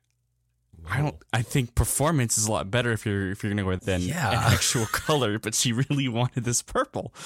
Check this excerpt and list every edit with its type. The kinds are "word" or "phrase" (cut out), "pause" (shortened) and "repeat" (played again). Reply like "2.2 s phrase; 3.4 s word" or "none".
3.8 s word